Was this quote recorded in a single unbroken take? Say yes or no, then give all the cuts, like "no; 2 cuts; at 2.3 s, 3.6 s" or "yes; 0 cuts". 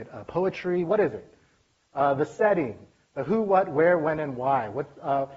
yes; 0 cuts